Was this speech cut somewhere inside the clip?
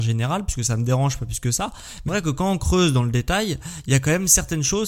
yes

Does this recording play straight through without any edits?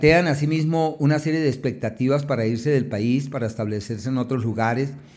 yes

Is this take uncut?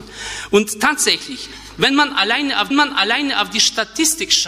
no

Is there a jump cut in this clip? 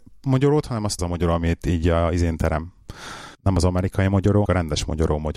yes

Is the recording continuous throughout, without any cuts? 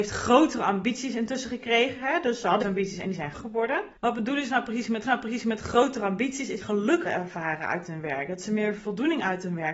no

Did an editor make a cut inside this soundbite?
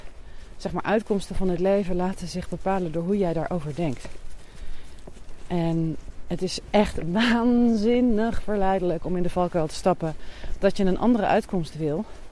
no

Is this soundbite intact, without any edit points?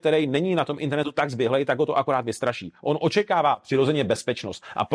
yes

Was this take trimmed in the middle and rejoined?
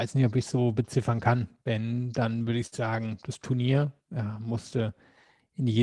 no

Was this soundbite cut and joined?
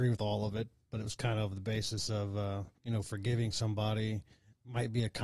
yes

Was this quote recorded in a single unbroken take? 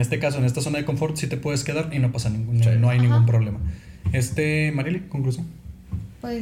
yes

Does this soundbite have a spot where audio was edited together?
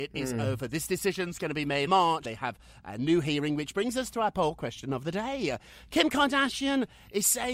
yes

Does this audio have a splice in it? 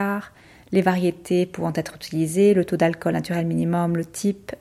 no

